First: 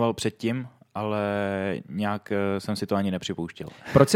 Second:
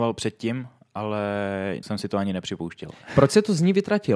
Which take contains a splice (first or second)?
second